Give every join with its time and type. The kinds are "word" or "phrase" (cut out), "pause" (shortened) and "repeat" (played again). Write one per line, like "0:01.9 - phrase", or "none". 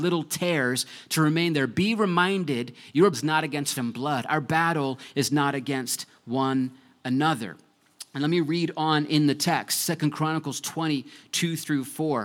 0:03.1 - word
0:03.8 - word